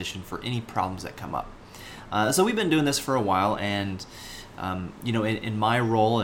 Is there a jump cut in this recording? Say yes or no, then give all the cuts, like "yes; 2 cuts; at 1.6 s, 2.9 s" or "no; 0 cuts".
no; 0 cuts